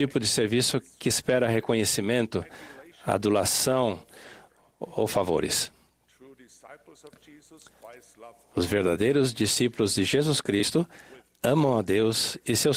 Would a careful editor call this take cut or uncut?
uncut